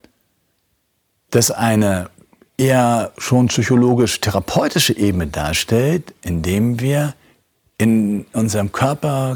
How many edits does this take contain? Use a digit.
0